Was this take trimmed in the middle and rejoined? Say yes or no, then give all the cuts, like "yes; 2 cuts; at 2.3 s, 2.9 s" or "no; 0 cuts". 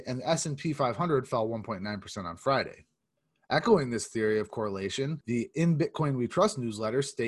no; 0 cuts